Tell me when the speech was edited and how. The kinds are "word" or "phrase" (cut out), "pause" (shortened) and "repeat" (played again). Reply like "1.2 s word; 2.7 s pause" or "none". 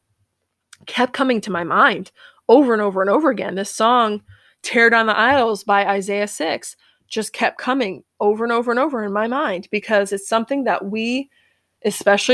none